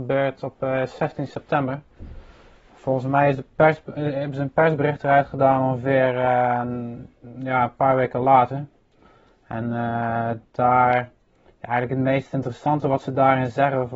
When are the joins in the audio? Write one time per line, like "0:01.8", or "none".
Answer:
none